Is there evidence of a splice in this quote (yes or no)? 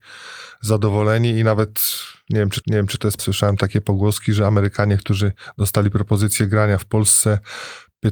yes